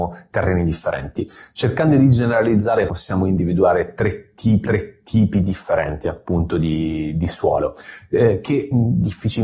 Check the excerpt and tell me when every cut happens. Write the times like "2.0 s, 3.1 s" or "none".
2.9 s, 4.6 s

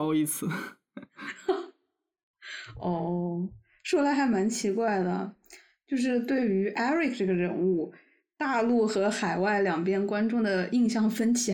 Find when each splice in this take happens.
none

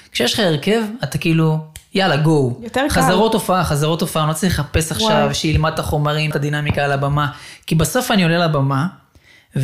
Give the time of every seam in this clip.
6.3 s

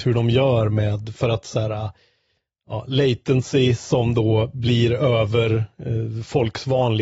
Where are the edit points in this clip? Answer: none

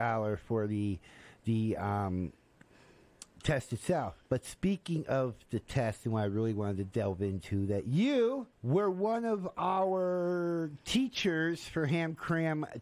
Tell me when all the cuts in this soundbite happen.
3.3 s, 4.3 s, 8.5 s

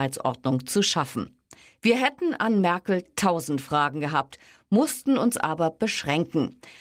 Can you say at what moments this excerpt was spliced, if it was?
1.7 s

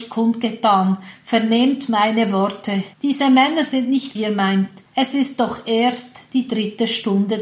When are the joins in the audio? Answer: 2.9 s, 4.2 s, 4.9 s

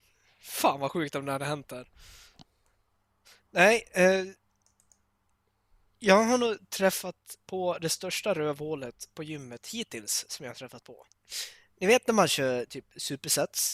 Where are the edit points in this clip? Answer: none

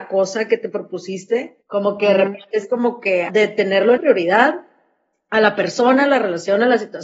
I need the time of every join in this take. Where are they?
1.6 s, 3.3 s, 4.0 s

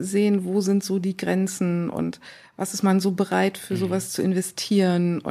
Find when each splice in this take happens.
none

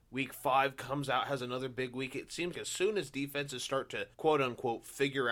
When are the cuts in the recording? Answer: 2.5 s, 4.1 s

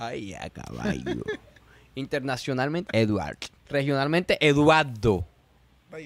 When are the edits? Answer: 2.9 s, 3.6 s

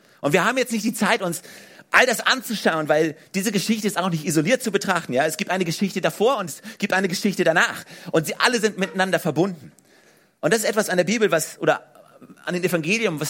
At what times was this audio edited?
none

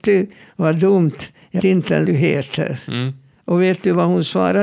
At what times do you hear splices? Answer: 1.6 s, 2.1 s

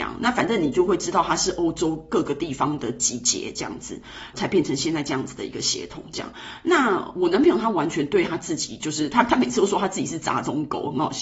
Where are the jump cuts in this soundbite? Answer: 4.3 s

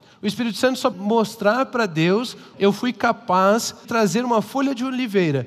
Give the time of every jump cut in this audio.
0.9 s, 2.5 s, 3.8 s

